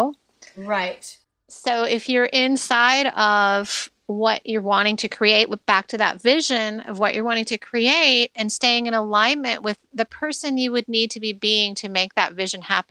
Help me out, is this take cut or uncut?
cut